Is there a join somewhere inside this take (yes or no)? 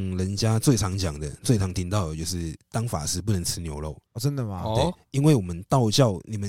yes